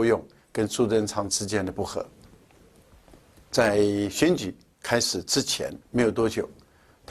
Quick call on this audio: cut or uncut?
cut